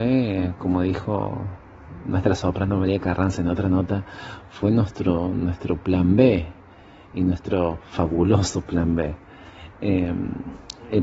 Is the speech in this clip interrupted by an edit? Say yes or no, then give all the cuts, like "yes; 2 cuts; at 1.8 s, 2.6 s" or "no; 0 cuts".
no; 0 cuts